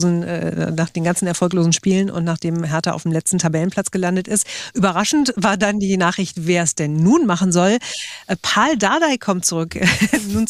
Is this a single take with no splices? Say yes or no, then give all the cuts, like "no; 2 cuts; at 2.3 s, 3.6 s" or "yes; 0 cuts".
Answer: yes; 0 cuts